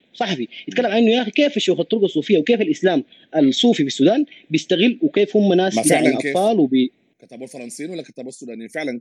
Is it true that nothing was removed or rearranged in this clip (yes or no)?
yes